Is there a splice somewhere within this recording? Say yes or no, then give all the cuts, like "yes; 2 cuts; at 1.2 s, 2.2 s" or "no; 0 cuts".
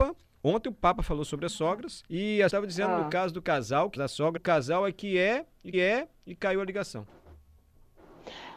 yes; 5 cuts; at 2.1 s, 2.5 s, 4.0 s, 4.4 s, 5.7 s